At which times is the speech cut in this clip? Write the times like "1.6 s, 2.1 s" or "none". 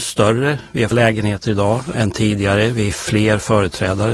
0.9 s, 1.9 s